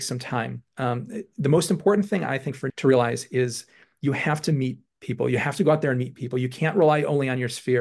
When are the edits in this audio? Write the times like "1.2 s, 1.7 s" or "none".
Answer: 2.7 s